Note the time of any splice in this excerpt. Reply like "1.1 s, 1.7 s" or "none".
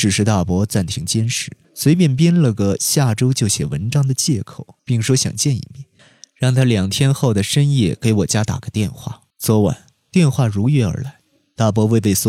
1.6 s, 4.8 s, 9.3 s

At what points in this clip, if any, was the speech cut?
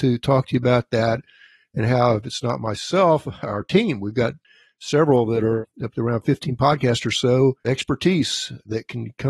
7.6 s

